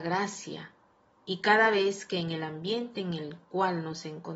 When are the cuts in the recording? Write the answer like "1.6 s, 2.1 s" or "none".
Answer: none

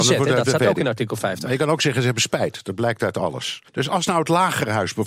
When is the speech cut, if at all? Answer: 3.7 s

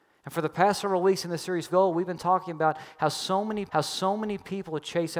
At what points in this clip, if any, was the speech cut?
1.7 s, 3.7 s

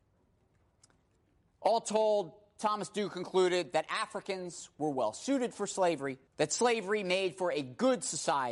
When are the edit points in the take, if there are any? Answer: 6.3 s

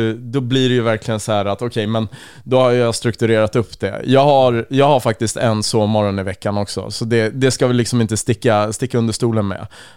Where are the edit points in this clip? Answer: none

